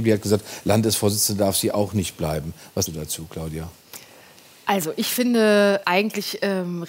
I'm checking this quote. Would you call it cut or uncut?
cut